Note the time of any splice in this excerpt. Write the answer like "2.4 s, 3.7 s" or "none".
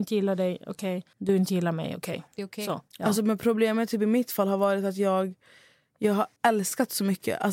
1.1 s, 2.3 s, 2.9 s, 6.4 s